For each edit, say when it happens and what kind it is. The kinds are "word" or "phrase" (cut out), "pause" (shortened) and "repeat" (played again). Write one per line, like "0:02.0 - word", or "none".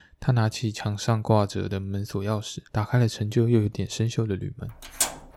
0:02.7 - pause